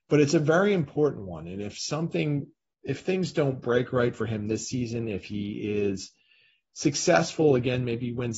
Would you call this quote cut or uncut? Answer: uncut